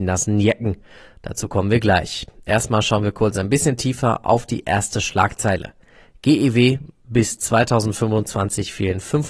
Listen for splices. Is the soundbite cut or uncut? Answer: uncut